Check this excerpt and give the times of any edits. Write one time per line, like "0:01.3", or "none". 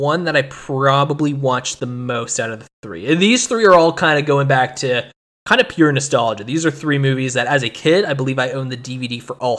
none